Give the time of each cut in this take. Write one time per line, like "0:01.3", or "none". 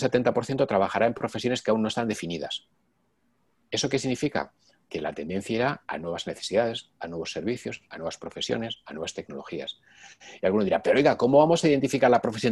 none